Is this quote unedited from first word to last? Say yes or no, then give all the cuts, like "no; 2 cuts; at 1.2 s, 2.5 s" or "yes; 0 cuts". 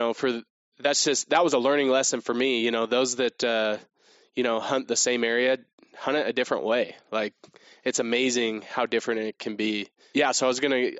yes; 0 cuts